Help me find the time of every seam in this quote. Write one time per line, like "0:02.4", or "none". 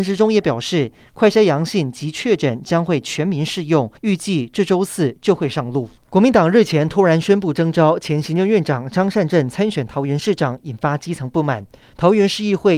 0:04.0
0:06.0
0:11.8